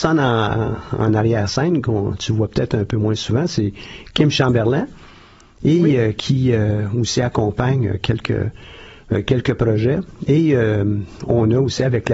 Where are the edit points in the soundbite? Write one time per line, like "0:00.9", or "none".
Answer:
none